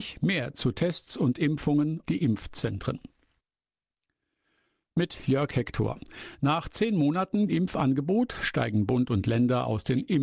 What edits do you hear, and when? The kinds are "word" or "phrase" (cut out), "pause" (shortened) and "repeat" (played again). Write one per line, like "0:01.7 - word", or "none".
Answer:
0:02.0 - word
0:07.5 - word